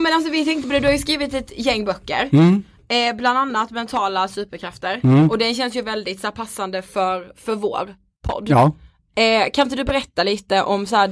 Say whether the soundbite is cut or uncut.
uncut